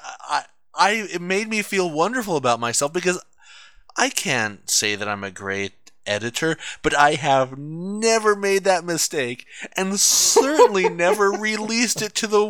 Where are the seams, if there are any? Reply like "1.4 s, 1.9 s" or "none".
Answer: none